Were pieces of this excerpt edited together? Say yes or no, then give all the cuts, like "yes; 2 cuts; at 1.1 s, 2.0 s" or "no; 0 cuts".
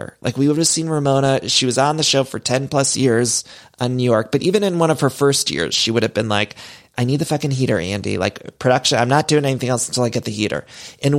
no; 0 cuts